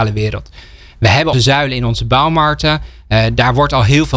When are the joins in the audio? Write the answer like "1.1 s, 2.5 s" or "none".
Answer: 1.3 s